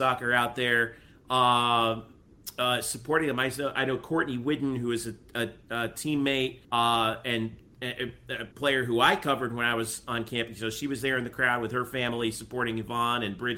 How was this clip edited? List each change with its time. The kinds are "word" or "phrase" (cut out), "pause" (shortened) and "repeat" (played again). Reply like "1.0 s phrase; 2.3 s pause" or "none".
6.6 s pause; 8.5 s pause